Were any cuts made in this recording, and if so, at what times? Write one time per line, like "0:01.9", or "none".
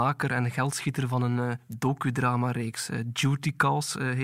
none

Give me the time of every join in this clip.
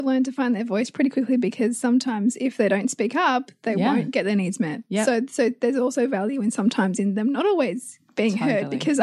none

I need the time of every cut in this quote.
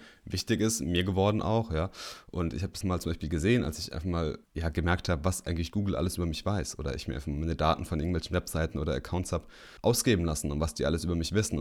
0:02.8
0:04.4
0:09.8

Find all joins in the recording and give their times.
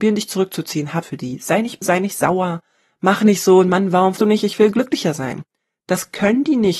0:01.0
0:01.8
0:04.2

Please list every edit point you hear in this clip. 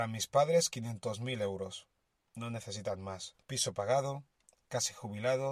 0:03.4

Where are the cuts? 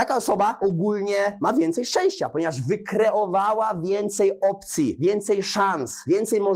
none

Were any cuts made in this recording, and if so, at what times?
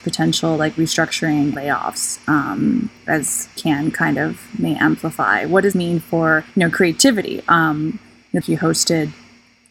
0:01.6
0:05.7
0:06.5
0:08.4

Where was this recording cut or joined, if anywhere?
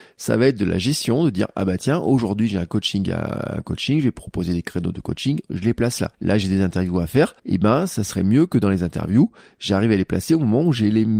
0:06.1
0:07.4

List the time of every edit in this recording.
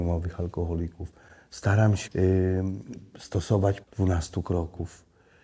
0:02.1
0:03.8

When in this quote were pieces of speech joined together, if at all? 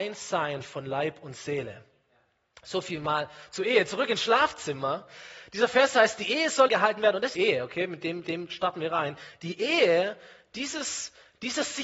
0:06.7
0:07.3
0:08.2

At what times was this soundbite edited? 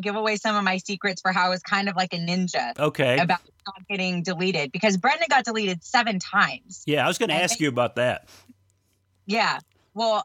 none

